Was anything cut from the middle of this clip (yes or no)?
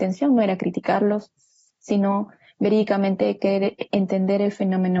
no